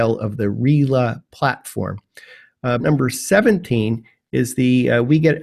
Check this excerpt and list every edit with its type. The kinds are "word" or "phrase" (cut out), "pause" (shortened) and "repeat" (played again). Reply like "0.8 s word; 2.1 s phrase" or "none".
2.8 s word